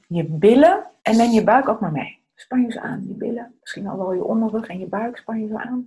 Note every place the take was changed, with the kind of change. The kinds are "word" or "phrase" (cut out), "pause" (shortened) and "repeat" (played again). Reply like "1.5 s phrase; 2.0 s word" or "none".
1.0 s pause; 3.6 s pause